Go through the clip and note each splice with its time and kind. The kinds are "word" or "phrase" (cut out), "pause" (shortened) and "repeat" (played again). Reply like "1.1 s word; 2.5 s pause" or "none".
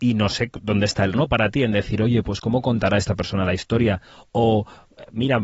1.1 s word